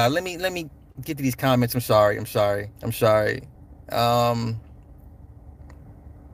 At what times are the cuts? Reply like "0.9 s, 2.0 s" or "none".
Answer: 2.8 s, 3.6 s